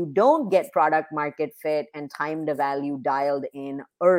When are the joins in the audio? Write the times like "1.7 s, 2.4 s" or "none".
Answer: none